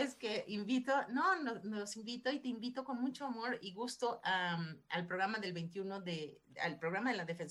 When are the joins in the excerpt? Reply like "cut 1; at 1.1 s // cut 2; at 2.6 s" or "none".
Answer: none